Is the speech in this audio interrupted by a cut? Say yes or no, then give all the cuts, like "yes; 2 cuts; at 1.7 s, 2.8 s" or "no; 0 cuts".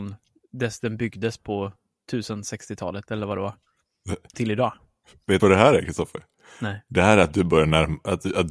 yes; 2 cuts; at 4.3 s, 5.4 s